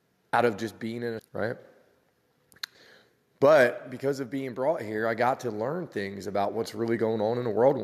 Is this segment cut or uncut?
cut